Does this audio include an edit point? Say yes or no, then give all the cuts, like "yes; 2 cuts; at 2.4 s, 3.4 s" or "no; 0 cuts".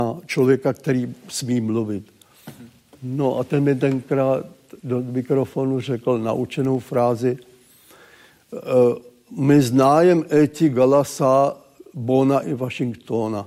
no; 0 cuts